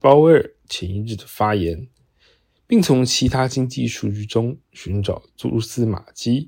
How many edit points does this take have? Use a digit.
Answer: 0